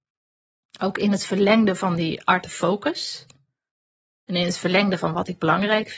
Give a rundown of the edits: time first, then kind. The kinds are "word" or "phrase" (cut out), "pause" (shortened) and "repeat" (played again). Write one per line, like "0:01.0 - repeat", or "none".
none